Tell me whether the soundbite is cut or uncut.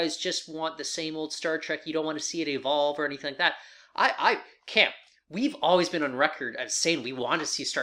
uncut